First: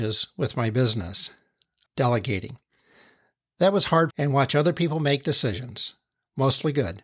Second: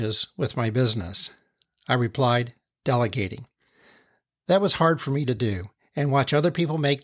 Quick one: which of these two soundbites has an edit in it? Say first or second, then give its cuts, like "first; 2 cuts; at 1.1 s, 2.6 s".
first; 2 cuts; at 1.9 s, 4.1 s